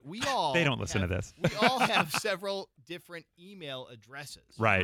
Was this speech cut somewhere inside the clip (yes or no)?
no